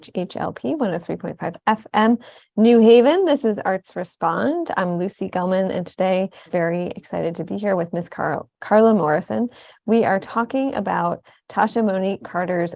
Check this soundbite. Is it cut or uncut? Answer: cut